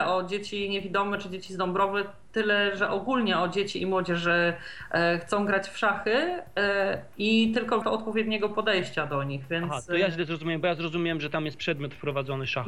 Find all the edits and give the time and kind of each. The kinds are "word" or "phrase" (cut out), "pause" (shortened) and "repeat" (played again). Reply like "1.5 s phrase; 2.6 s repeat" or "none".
7.8 s word